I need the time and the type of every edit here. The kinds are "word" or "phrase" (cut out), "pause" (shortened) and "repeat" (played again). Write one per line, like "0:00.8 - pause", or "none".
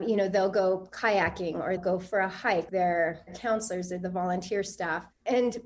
0:01.8 - word
0:02.7 - word